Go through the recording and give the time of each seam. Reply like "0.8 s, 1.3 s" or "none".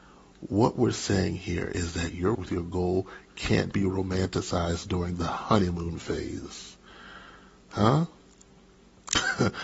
2.3 s, 3.7 s